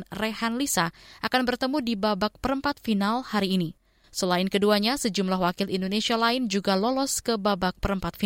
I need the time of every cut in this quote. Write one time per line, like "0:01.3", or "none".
none